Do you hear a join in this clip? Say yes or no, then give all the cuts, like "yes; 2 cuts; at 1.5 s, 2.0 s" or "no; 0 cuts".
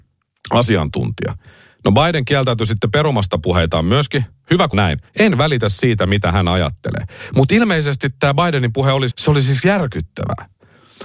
yes; 3 cuts; at 4.7 s, 5.1 s, 9.1 s